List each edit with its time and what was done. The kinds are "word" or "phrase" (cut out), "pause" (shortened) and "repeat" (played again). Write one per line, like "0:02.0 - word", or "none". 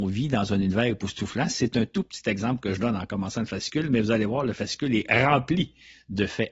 none